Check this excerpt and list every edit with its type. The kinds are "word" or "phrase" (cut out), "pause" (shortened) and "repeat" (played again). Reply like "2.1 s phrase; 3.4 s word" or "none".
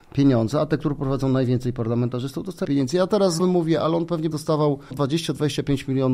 2.6 s word; 3.4 s word; 4.3 s word; 4.9 s word